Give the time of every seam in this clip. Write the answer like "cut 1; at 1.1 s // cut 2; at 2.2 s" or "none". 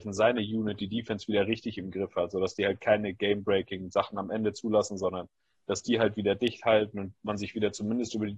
none

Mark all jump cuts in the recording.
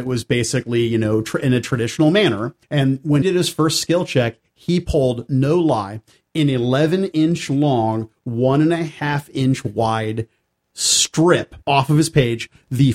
cut 1; at 2.6 s // cut 2; at 3.2 s // cut 3; at 11.6 s

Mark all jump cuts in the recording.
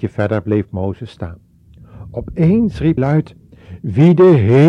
cut 1; at 3.0 s

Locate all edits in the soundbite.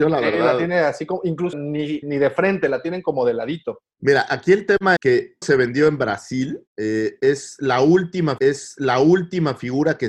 cut 1; at 1.5 s // cut 2; at 2.0 s // cut 3; at 3.9 s // cut 4; at 5.0 s // cut 5; at 5.4 s // cut 6; at 6.7 s // cut 7; at 8.4 s

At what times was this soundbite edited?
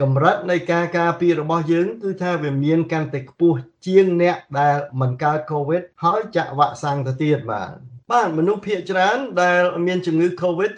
cut 1; at 5.9 s // cut 2; at 8.0 s

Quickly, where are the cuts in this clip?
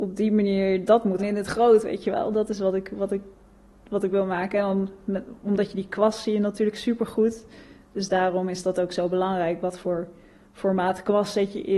cut 1; at 1.2 s

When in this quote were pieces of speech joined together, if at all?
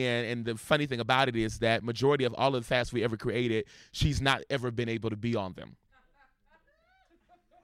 none

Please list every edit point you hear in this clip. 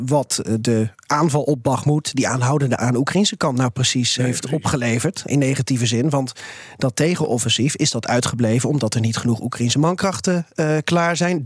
cut 1; at 2.8 s // cut 2; at 5.3 s

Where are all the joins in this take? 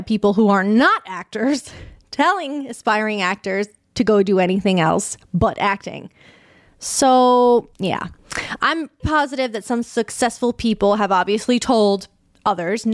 cut 1; at 7.7 s // cut 2; at 9.0 s

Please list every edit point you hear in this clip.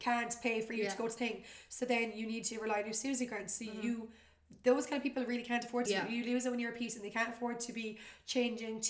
cut 1; at 1.2 s // cut 2; at 5.9 s

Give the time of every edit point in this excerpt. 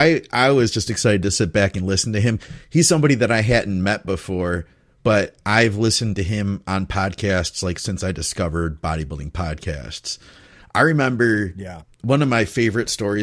none

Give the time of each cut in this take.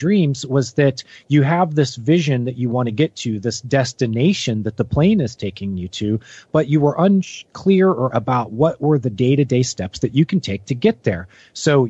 cut 1; at 8.1 s

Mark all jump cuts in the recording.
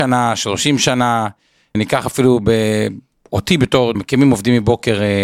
cut 1; at 1.7 s // cut 2; at 3.9 s

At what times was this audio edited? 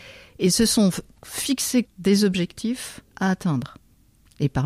cut 1; at 1.8 s // cut 2; at 3.1 s

